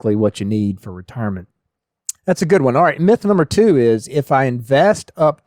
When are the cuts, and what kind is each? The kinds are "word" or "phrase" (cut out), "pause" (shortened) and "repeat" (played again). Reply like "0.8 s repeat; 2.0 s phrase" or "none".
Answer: 2.2 s pause